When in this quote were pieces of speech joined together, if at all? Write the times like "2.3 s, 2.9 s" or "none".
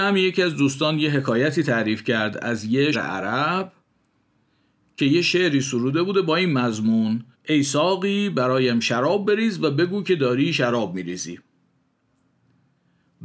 2.9 s, 7.3 s